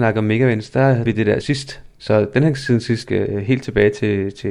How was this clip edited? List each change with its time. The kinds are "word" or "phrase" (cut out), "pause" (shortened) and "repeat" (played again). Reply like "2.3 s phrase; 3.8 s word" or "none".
1.0 s word; 1.4 s word; 1.9 s pause; 3.0 s phrase

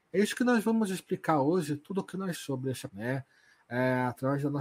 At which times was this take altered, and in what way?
2.3 s word; 2.9 s word

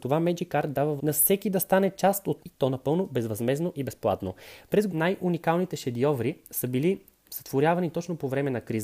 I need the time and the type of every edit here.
1.0 s word; 2.4 s word; 4.9 s word

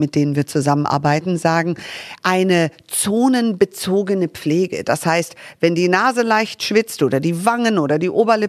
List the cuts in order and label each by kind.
none

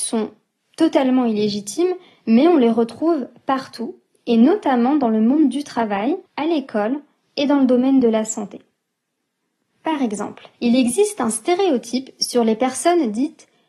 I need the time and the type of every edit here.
6.3 s pause; 10.5 s pause

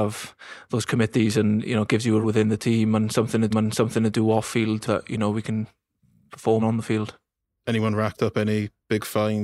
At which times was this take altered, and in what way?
2.2 s word; 3.5 s repeat; 4.9 s phrase; 6.6 s word

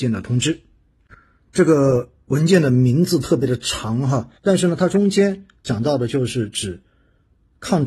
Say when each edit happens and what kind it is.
4.4 s pause

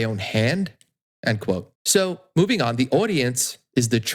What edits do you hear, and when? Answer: 1.8 s pause

